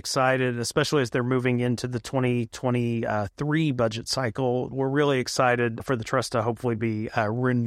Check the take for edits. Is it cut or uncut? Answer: uncut